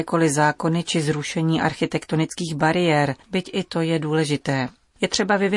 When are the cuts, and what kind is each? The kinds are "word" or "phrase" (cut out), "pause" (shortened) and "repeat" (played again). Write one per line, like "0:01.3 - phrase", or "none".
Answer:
0:03.2 - pause